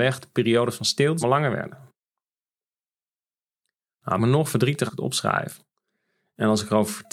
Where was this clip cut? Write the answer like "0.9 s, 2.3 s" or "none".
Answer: 1.2 s, 4.2 s, 4.9 s